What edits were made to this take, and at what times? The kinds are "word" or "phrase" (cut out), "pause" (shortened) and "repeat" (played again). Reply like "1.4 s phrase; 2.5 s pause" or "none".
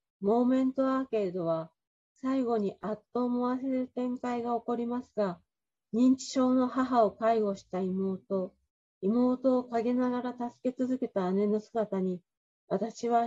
none